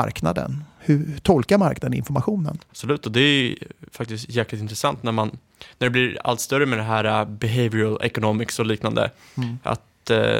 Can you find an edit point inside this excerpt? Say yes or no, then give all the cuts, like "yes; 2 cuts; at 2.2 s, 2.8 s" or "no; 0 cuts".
no; 0 cuts